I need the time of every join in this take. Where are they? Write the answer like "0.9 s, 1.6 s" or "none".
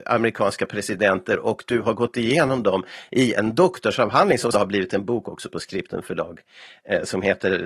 4.5 s